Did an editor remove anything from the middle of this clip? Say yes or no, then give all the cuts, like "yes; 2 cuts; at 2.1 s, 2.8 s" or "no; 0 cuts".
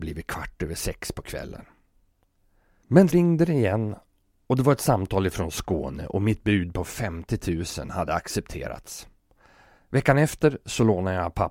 yes; 1 cut; at 3.1 s